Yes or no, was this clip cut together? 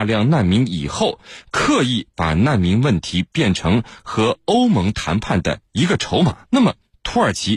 yes